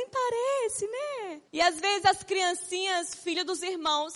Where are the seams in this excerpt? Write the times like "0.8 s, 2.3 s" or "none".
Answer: 1.5 s